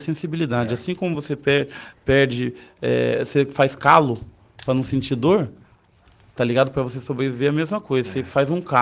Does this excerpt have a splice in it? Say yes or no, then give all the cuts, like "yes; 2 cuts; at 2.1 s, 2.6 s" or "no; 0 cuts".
no; 0 cuts